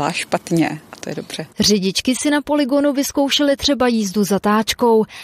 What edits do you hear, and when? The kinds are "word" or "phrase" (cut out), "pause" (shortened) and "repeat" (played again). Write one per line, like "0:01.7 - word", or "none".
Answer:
0:01.5 - pause